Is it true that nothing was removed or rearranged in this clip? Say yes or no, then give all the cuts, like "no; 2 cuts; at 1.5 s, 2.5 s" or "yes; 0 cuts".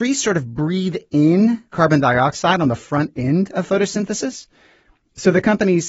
yes; 0 cuts